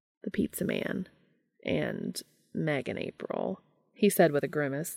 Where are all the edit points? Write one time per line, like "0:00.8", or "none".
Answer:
none